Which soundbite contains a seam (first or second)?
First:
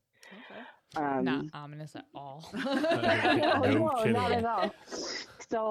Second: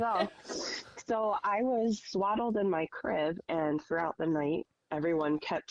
second